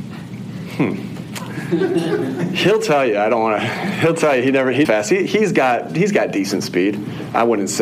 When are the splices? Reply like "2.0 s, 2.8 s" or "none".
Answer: 4.8 s